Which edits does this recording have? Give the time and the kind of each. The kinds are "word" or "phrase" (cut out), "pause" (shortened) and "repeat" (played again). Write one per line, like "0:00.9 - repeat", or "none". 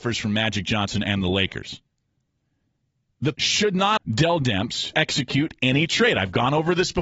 0:03.3 - word
0:04.0 - word
0:04.9 - word